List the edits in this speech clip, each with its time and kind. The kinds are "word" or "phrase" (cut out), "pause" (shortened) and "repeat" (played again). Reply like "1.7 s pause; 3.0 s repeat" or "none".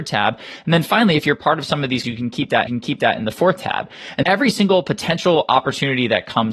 2.0 s word; 2.7 s repeat; 4.2 s word

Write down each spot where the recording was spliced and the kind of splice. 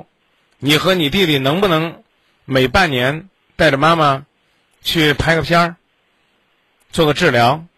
none

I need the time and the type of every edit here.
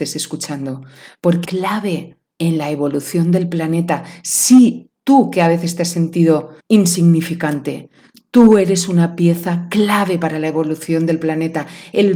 1.4 s phrase; 2.3 s pause; 4.9 s word; 6.6 s pause

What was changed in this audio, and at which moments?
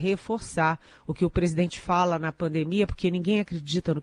none

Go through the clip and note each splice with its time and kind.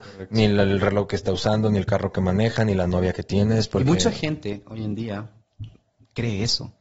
none

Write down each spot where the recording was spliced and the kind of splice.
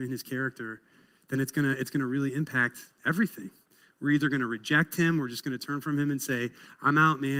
none

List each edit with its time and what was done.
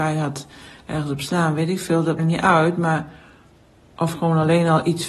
2.2 s word

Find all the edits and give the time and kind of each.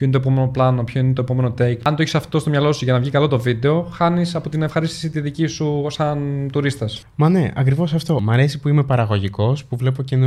none

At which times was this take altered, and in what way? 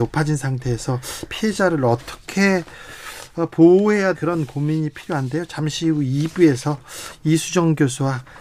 4.1 s word

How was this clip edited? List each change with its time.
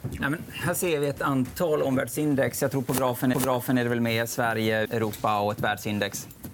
3.3 s repeat; 4.8 s word

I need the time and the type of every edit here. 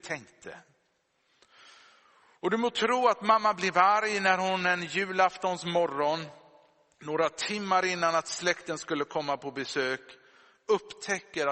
none

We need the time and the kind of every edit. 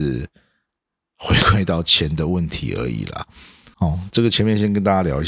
3.7 s pause

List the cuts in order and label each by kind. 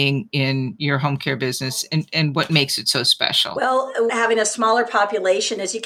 4.1 s phrase

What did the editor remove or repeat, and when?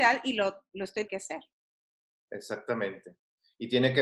1.1 s word

